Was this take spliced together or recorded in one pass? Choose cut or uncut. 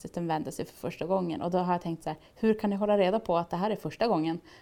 uncut